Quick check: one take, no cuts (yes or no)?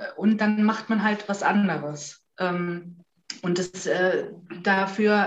yes